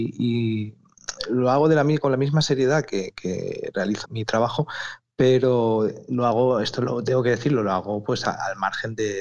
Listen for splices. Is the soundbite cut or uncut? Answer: cut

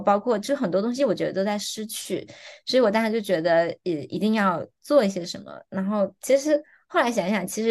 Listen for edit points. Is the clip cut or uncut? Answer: uncut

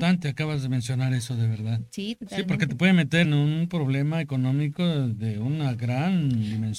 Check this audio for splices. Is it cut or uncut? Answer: cut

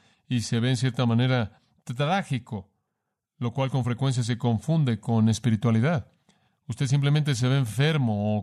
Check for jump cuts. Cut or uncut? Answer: uncut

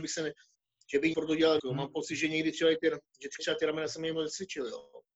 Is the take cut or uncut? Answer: cut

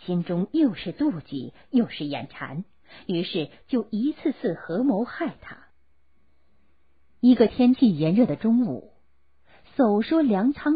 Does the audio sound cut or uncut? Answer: uncut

